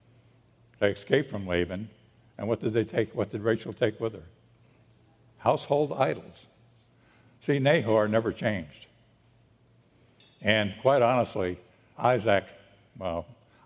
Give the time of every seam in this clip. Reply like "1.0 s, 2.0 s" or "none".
12.0 s